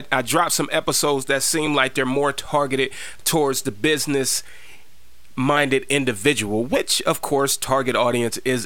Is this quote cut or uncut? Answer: uncut